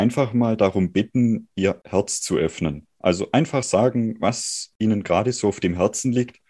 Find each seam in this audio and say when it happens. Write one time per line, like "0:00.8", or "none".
none

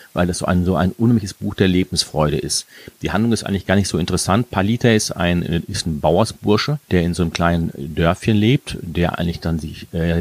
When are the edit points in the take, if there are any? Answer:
0:06.8

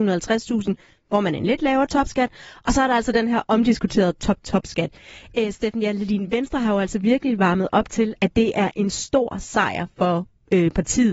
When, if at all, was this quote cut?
none

